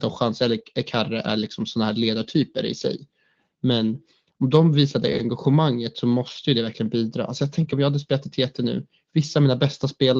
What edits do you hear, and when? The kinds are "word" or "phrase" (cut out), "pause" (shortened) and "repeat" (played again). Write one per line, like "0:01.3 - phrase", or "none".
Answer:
none